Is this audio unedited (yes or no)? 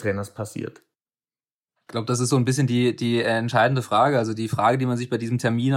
yes